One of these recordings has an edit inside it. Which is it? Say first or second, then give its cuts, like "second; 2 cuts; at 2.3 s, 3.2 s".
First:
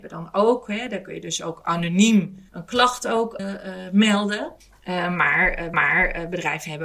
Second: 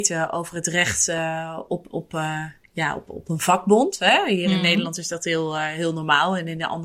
first; 4 cuts; at 2.5 s, 3.4 s, 4.6 s, 5.7 s